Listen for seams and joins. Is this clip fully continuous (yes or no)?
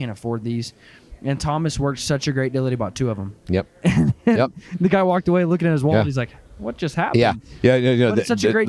yes